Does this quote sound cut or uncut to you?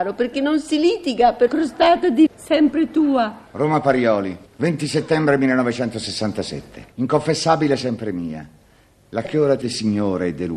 cut